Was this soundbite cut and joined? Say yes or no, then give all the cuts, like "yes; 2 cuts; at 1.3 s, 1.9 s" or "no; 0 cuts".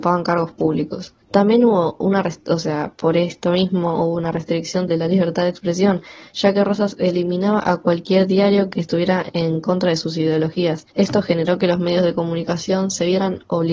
yes; 3 cuts; at 1.2 s, 4.9 s, 10.9 s